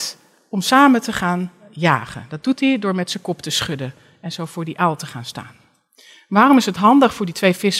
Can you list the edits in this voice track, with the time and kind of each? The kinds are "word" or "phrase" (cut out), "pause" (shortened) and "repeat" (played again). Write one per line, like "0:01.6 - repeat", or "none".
none